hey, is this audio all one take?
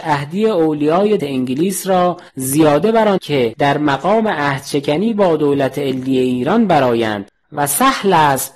no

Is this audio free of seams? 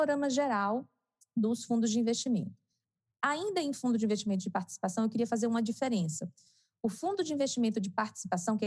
yes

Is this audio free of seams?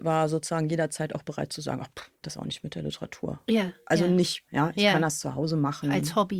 no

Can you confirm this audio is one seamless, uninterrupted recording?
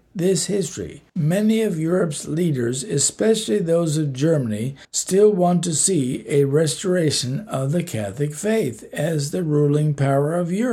no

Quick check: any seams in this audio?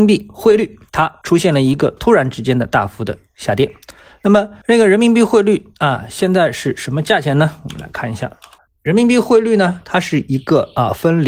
no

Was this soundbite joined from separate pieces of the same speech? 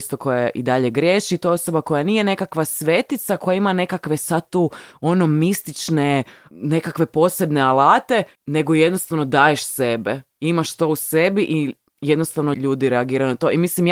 yes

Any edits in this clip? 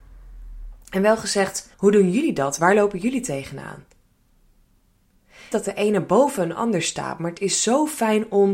yes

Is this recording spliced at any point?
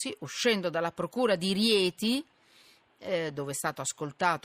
no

